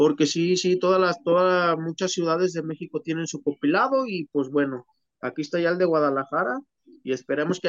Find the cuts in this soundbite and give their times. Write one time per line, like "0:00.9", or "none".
none